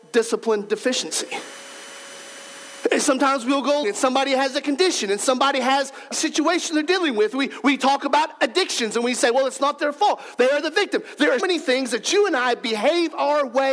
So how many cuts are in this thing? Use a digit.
3